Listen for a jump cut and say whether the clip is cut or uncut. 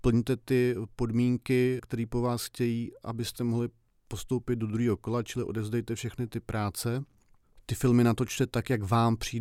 cut